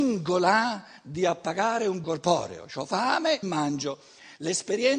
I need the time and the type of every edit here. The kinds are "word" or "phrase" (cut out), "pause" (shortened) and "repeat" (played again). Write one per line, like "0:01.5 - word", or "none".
0:02.0 - word
0:03.4 - word